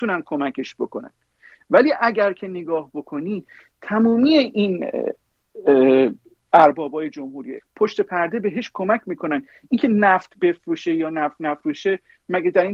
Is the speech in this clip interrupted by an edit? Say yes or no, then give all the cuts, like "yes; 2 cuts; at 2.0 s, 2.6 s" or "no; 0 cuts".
yes; 1 cut; at 7.6 s